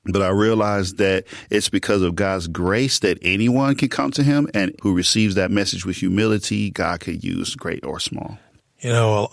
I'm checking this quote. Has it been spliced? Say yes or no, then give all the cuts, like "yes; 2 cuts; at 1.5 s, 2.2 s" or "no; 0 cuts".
yes; 1 cut; at 4.8 s